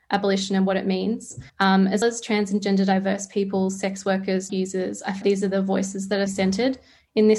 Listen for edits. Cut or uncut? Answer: cut